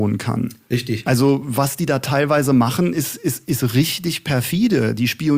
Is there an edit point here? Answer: no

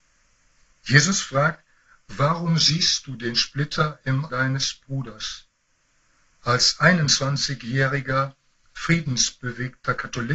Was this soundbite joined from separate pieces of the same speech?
yes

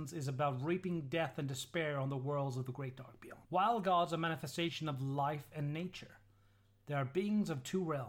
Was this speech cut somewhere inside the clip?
yes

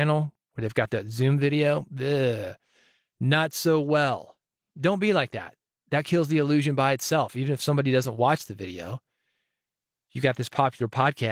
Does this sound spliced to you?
no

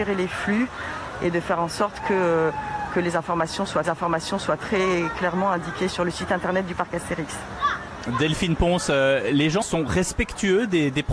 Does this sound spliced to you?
yes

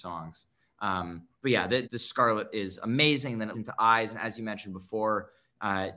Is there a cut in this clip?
yes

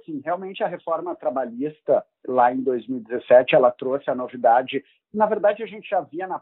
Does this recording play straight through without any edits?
yes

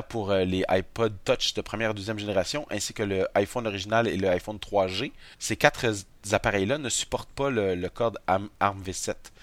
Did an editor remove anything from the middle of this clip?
yes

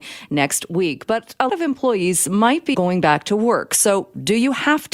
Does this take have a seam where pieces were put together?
yes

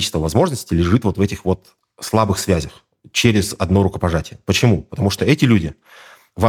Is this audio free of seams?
yes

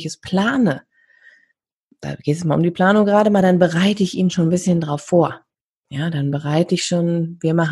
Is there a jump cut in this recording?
no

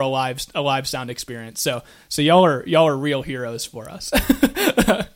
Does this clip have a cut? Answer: no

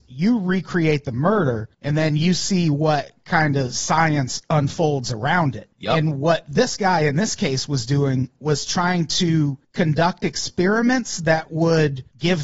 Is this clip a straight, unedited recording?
yes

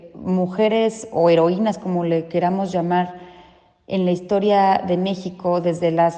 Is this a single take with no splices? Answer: yes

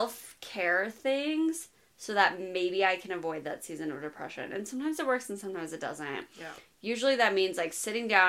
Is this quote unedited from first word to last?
yes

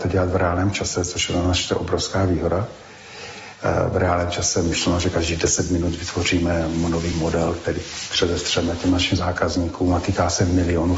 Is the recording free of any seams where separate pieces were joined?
yes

